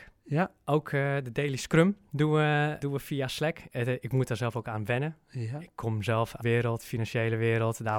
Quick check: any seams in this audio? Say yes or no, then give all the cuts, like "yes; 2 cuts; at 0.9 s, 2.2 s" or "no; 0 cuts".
yes; 2 cuts; at 2.8 s, 6.4 s